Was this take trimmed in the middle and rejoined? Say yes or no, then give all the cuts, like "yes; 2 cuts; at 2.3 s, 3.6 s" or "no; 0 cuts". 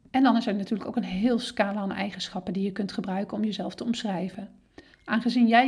no; 0 cuts